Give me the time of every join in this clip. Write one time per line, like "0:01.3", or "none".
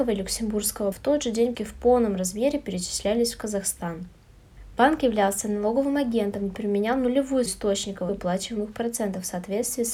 0:00.9
0:01.5
0:07.5
0:08.1